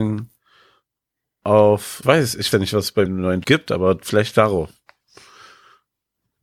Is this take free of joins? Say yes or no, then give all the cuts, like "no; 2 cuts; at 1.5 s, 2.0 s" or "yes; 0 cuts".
no; 4 cuts; at 2.0 s, 2.5 s, 3.1 s, 3.4 s